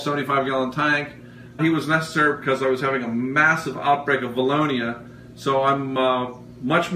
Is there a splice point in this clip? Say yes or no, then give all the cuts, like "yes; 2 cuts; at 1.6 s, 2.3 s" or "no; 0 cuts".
yes; 1 cut; at 1.6 s